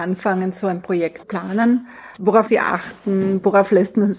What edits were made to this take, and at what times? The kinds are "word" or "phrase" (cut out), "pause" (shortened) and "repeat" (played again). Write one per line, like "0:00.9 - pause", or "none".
0:01.2 - word
0:02.5 - word